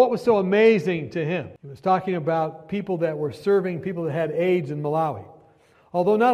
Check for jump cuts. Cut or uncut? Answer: cut